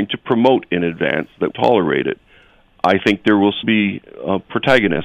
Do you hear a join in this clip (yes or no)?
yes